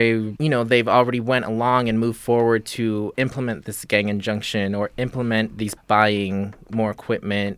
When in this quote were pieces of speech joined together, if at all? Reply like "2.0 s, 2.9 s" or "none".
3.1 s, 5.8 s